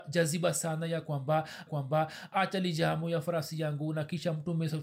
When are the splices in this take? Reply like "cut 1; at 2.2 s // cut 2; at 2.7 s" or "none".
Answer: cut 1; at 1.7 s